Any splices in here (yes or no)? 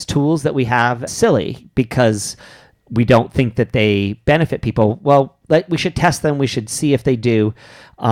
yes